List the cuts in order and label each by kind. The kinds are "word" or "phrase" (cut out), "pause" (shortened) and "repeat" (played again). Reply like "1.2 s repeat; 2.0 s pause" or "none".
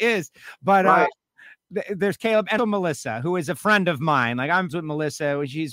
2.6 s word; 4.7 s word